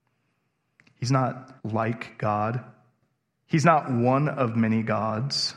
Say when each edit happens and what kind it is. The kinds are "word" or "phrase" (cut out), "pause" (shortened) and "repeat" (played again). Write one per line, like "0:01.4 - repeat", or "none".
0:01.6 - pause